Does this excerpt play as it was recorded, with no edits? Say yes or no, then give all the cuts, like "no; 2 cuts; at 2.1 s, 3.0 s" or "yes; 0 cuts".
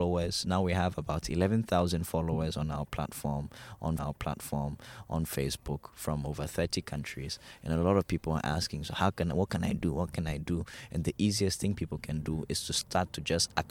no; 1 cut; at 4.0 s